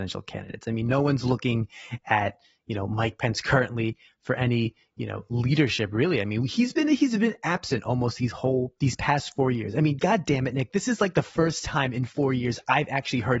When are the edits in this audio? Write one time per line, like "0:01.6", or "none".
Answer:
none